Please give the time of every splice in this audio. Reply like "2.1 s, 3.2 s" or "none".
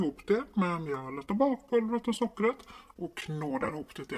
none